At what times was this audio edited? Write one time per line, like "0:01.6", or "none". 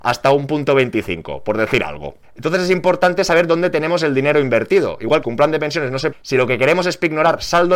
0:02.2
0:05.2
0:06.1